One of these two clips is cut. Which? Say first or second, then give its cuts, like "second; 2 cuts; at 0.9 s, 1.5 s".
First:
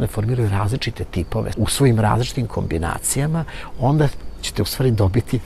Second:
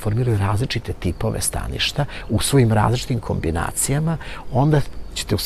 first; 1 cut; at 1.5 s